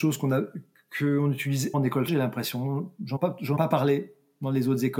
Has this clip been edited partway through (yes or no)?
yes